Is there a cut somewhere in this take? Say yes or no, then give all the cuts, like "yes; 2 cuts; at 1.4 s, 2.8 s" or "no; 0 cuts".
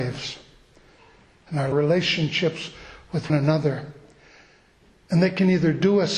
yes; 2 cuts; at 1.7 s, 3.3 s